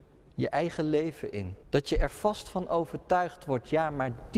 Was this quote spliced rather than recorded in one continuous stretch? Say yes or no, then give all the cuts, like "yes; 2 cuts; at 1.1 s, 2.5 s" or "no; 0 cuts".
yes; 1 cut; at 1.6 s